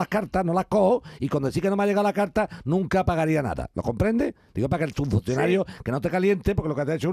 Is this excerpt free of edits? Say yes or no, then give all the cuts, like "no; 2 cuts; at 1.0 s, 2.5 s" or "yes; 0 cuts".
yes; 0 cuts